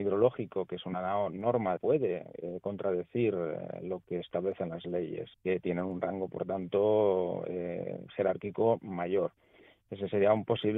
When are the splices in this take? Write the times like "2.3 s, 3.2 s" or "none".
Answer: 1.8 s, 5.3 s